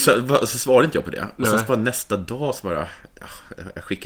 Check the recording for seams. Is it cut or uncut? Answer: uncut